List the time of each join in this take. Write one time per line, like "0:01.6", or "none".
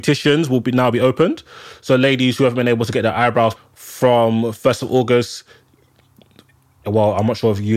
0:03.6